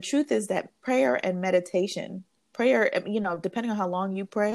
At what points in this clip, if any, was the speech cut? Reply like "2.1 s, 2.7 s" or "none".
none